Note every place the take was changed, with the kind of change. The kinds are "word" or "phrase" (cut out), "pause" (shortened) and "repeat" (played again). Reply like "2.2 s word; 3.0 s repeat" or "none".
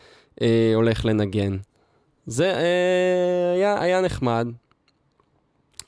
none